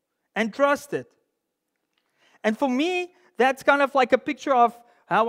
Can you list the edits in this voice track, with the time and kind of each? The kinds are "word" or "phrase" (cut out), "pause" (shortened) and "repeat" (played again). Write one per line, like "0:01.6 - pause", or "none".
none